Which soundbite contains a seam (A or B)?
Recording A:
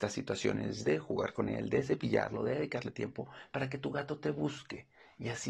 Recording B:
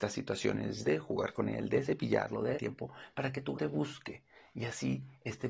B